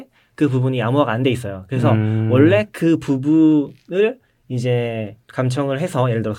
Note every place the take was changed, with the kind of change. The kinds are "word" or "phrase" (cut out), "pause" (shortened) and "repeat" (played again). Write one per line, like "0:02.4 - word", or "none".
0:05.2 - pause